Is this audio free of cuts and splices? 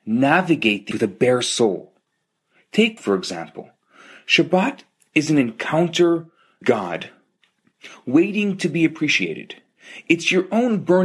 no; 3 cuts; at 0.9 s, 3.0 s, 6.6 s

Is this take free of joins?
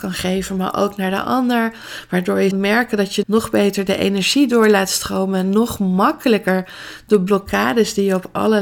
no; 2 cuts; at 2.5 s, 3.2 s

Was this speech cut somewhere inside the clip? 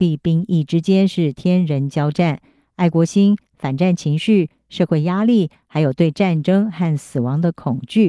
no; 0 cuts

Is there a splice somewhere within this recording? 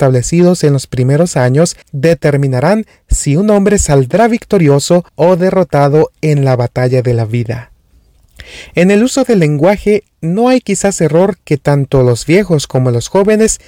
yes; 2 cuts; at 1.8 s, 5.1 s

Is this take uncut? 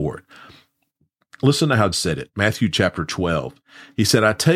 no; 1 cut; at 1.9 s

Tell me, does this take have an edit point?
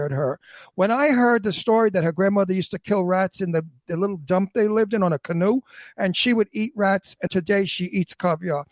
yes; 1 cut; at 7.3 s

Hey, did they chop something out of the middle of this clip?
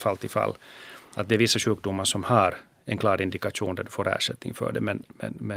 no; 0 cuts

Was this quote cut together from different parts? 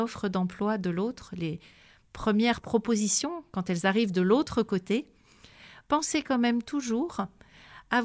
no; 0 cuts

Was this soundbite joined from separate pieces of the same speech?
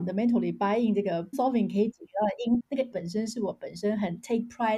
yes; 3 cuts; at 1.3 s, 2.6 s, 2.9 s

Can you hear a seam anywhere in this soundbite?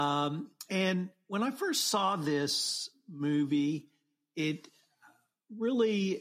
no; 0 cuts

